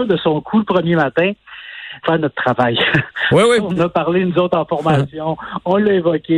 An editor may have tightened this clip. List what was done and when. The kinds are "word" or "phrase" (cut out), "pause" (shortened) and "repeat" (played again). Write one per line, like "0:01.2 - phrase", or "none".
0:02.0 - word
0:03.8 - word